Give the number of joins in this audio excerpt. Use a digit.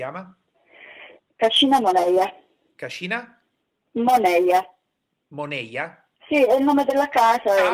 3